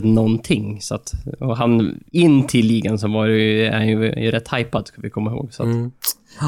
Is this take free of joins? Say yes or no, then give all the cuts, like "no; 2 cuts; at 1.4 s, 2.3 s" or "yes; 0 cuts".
no; 1 cut; at 2.1 s